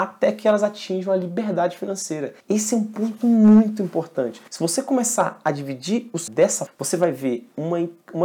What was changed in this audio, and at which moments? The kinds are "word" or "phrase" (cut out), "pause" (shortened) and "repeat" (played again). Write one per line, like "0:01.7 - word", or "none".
0:02.4 - pause
0:04.5 - pause
0:06.3 - word
0:06.7 - word

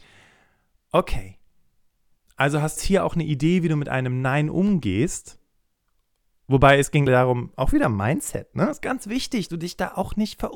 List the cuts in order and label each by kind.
0:02.8 - word
0:07.1 - word
0:09.5 - word

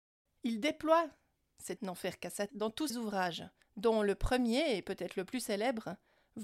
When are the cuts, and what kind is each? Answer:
0:01.8 - phrase
0:02.5 - word
0:02.9 - word
0:03.6 - pause

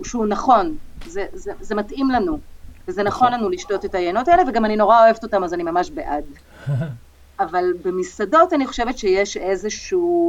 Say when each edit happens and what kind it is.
none

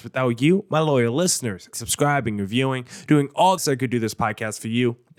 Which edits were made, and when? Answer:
0:01.7 - word
0:03.6 - word

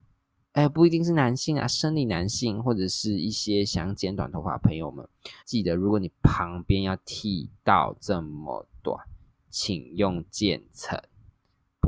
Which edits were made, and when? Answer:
0:05.4 - pause

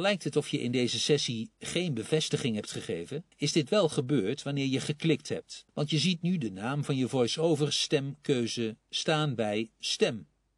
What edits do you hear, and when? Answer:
0:03.3 - pause
0:05.7 - pause

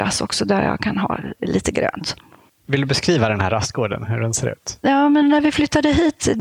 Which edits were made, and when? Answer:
none

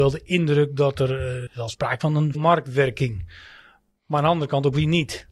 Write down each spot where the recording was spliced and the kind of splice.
0:01.5 - word
0:02.0 - word
0:02.3 - word

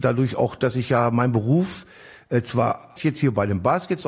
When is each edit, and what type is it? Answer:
0:03.0 - word

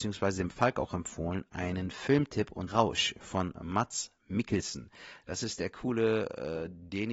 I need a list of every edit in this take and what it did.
0:02.7 - phrase

